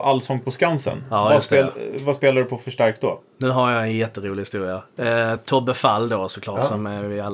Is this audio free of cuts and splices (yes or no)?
yes